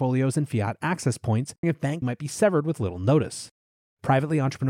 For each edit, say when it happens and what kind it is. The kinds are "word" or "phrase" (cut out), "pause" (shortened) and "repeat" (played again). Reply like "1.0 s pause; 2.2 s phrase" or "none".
1.6 s word; 2.0 s word